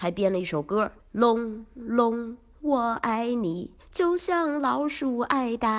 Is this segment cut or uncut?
cut